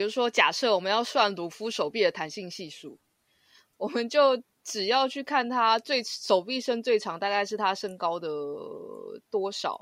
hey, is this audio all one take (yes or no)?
yes